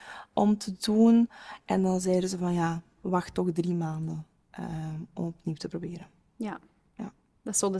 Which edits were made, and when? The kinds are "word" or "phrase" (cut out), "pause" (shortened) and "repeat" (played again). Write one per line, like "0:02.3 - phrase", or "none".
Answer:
none